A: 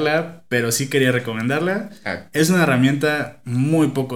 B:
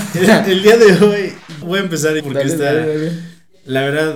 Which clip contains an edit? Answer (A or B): B